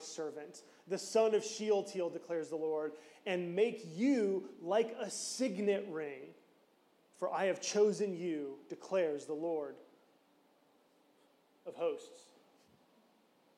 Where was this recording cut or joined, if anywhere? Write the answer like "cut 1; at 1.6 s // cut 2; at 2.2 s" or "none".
none